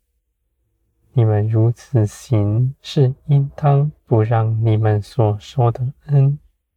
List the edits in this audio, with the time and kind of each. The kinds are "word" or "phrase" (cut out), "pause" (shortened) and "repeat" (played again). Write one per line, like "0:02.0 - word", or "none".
0:02.8 - pause
0:04.0 - pause